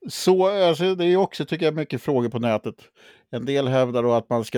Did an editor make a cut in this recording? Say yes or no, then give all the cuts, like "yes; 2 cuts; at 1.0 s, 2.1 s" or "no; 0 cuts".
no; 0 cuts